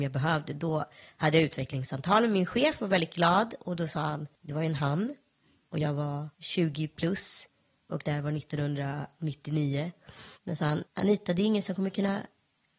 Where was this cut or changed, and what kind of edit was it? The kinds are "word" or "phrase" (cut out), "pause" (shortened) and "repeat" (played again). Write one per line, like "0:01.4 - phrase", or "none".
0:04.3 - pause
0:06.3 - pause
0:10.4 - pause
0:10.9 - pause

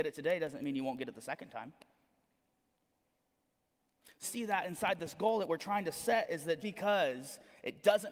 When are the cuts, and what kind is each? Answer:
0:04.2 - word
0:06.6 - word

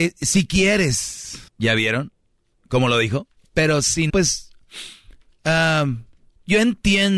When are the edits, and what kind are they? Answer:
0:01.5 - pause
0:03.4 - pause
0:04.1 - word

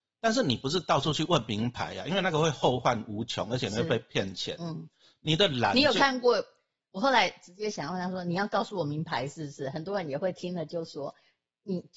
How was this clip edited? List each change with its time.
none

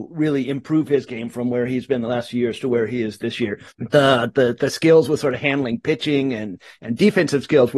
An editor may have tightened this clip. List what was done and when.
0:03.7 - pause

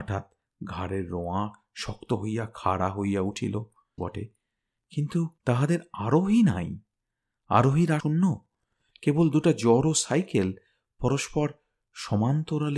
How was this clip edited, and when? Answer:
0:04.0 - phrase
0:05.4 - pause
0:08.0 - word

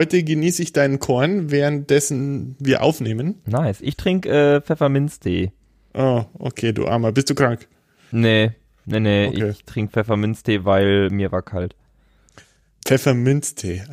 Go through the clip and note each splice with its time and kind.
none

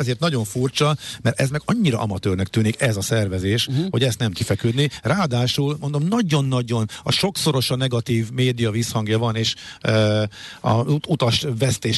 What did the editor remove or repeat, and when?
0:04.3 - word

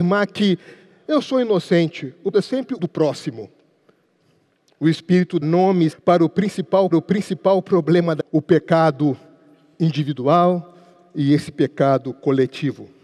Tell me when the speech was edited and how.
0:02.3 - word
0:02.8 - word
0:04.4 - pause
0:05.4 - word
0:05.9 - word
0:06.9 - repeat
0:08.2 - word

